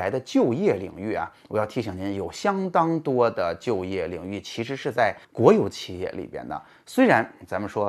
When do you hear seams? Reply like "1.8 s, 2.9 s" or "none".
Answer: 5.2 s